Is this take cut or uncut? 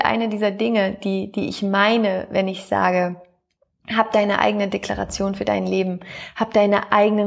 uncut